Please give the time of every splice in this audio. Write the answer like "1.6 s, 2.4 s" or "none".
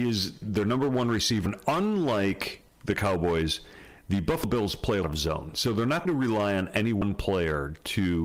5.0 s, 6.1 s